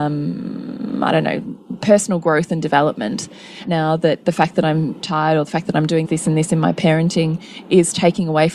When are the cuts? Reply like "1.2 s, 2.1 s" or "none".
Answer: 3.6 s, 5.0 s, 6.0 s